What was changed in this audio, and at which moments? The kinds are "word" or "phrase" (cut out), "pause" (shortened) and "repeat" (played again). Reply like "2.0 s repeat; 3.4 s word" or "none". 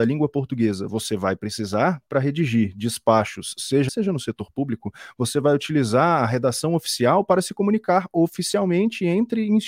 3.9 s phrase

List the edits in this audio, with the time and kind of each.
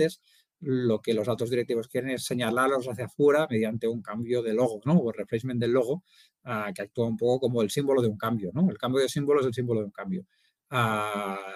none

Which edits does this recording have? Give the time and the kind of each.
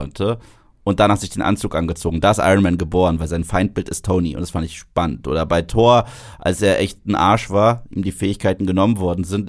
none

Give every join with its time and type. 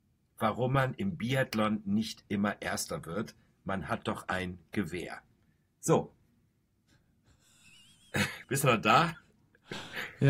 8.4 s pause

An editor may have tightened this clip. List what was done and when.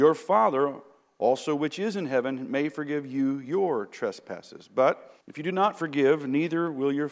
5.2 s pause

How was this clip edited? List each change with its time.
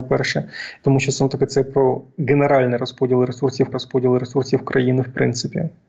3.7 s repeat

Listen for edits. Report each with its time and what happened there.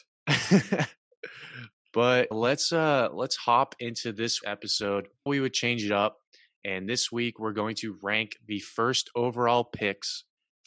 2.3 s word; 4.4 s word; 5.3 s word

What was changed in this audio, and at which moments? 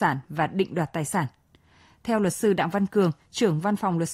none

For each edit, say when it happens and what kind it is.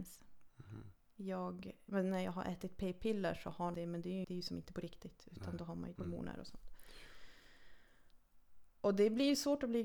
1.9 s word; 3.7 s phrase; 4.2 s word; 6.0 s word

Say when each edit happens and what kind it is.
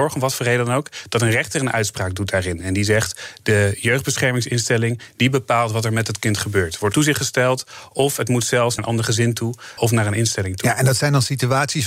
6.9 s word; 8.8 s word; 9.8 s word

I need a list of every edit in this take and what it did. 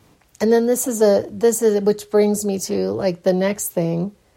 none

